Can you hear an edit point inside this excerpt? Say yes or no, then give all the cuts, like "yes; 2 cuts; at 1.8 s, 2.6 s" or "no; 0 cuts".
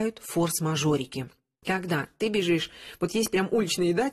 no; 0 cuts